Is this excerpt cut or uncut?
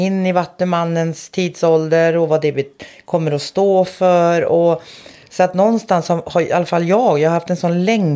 uncut